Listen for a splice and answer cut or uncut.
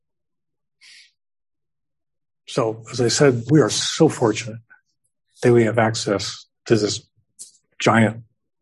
cut